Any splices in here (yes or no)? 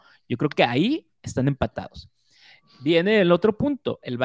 no